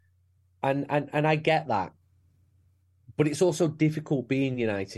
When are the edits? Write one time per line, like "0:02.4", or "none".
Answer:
none